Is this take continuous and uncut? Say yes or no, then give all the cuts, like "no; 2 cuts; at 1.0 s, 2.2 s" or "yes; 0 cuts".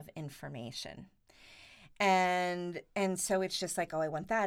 yes; 0 cuts